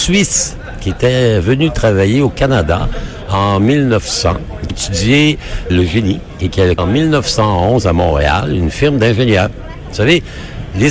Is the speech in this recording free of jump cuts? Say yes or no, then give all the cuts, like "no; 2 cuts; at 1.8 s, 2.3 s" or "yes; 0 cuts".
no; 3 cuts; at 4.7 s, 5.7 s, 6.8 s